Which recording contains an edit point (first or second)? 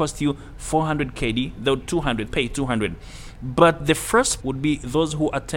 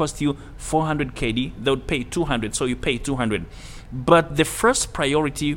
first